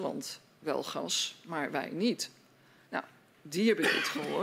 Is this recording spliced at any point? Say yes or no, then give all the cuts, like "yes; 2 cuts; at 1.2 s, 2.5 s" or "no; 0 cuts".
no; 0 cuts